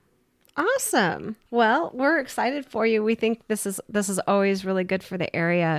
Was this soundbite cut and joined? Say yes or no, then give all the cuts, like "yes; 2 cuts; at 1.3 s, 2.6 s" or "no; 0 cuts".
yes; 1 cut; at 1.4 s